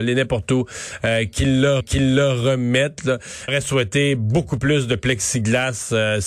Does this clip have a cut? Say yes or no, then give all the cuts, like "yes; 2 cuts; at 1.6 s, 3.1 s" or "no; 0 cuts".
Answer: yes; 2 cuts; at 1.8 s, 3.5 s